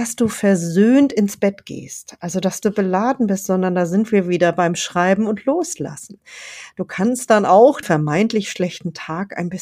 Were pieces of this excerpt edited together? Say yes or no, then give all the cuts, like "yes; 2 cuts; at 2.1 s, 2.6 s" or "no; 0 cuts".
yes; 2 cuts; at 2.6 s, 7.8 s